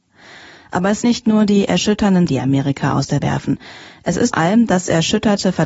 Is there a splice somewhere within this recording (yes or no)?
yes